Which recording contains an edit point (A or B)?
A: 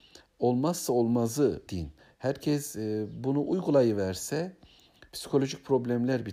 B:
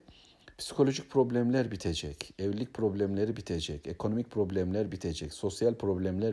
A